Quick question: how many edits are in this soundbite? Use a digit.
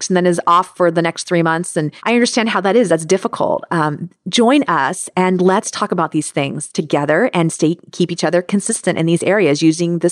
1